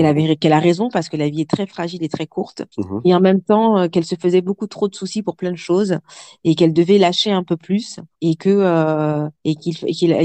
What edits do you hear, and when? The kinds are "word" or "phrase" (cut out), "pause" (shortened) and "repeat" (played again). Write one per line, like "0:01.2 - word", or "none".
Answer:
0:02.7 - pause
0:08.1 - pause
0:09.3 - pause